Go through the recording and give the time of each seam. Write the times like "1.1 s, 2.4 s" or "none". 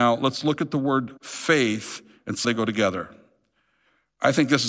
2.4 s